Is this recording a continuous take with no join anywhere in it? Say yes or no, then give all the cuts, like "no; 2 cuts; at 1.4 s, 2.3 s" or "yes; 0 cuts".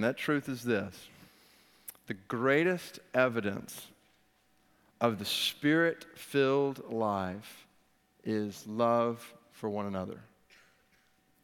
yes; 0 cuts